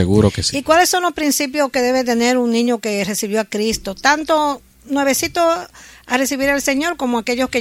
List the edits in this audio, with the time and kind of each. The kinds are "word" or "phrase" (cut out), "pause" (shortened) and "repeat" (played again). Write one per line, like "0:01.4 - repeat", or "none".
none